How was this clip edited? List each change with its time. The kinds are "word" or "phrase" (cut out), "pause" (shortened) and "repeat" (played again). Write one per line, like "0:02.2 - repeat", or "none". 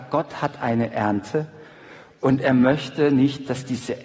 none